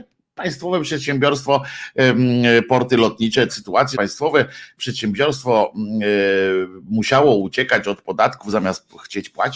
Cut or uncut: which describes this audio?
cut